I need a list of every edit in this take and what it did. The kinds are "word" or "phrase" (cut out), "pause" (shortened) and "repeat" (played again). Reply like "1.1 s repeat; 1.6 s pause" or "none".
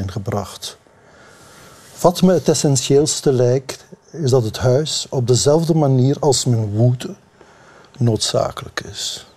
none

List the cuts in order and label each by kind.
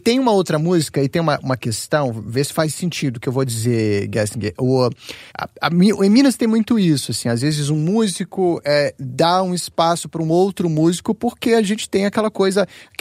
5.3 s pause

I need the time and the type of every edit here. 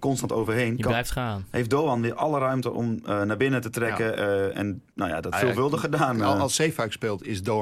5.3 s phrase

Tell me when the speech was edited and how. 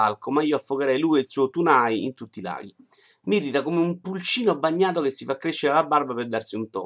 none

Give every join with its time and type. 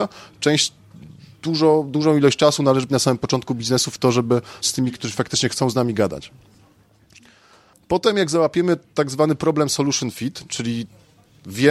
2.9 s word; 4.6 s word; 4.9 s word

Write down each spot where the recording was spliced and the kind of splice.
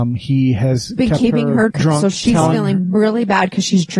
1.7 s word

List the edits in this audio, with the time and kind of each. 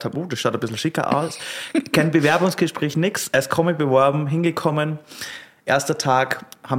none

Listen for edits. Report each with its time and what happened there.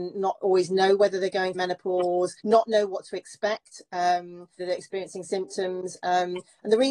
1.5 s word; 2.4 s pause; 4.6 s word

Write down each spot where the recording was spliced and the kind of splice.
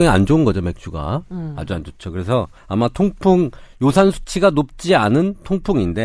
2.6 s pause

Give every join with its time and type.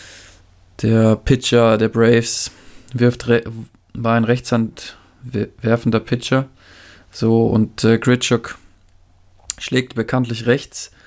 none

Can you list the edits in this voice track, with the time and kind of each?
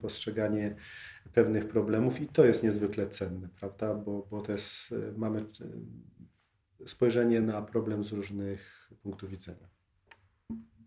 none

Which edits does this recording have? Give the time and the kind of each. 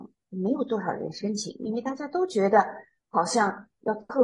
none

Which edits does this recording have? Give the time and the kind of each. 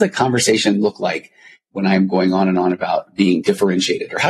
none

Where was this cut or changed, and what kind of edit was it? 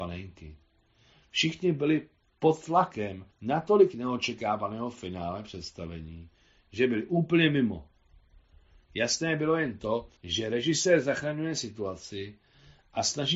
3.3 s pause; 10.2 s pause

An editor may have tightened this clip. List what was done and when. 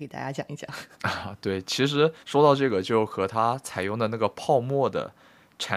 0.9 s pause; 2.2 s pause

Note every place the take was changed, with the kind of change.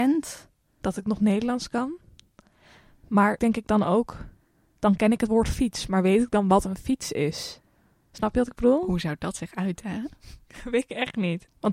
3.4 s word

